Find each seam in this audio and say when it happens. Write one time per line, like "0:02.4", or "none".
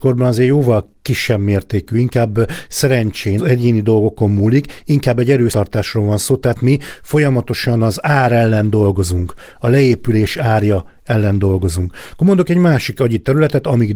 0:03.4
0:05.5